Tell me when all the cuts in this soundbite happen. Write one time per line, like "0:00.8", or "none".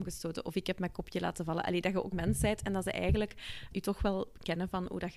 0:02.1
0:03.7